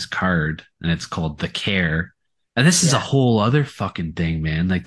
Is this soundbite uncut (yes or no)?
yes